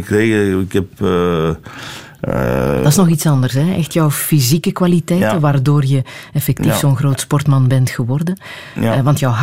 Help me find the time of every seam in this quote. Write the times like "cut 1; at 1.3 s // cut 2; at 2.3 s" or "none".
none